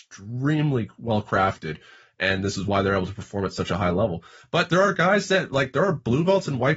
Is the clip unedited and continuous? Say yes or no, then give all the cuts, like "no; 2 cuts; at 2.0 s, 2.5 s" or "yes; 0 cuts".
yes; 0 cuts